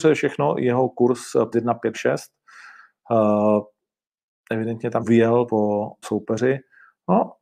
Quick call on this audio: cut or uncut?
cut